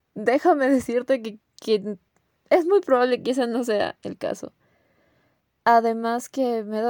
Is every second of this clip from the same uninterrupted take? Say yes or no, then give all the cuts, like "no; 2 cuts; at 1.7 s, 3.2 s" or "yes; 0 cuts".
yes; 0 cuts